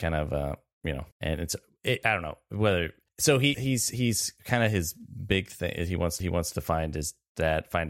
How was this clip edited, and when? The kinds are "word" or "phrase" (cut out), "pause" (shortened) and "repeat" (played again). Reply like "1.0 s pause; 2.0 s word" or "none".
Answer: 1.1 s pause; 3.1 s pause; 3.5 s word; 6.2 s repeat